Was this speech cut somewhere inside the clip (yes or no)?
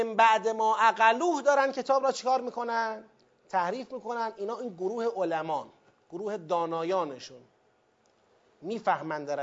no